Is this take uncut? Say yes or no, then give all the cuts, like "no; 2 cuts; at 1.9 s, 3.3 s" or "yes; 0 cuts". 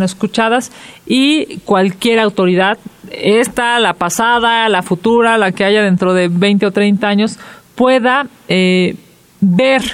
yes; 0 cuts